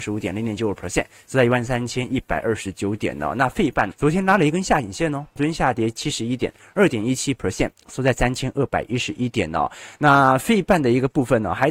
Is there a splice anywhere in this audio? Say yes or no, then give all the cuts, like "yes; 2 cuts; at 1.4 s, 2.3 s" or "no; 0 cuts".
yes; 2 cuts; at 3.9 s, 5.4 s